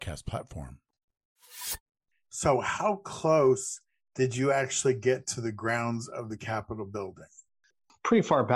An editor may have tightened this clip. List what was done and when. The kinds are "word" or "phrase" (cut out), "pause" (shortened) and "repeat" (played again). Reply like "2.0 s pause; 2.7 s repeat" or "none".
none